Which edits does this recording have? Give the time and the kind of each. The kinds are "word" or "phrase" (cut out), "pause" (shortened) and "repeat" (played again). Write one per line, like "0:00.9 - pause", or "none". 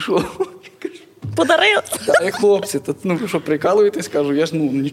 0:02.3 - word